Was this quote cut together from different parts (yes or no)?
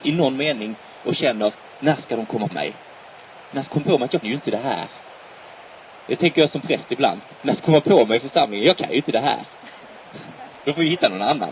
yes